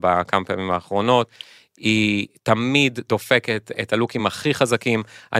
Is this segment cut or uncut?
uncut